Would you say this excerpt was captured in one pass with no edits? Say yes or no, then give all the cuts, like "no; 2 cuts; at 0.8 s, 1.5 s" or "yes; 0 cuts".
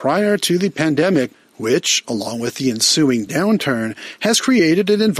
yes; 0 cuts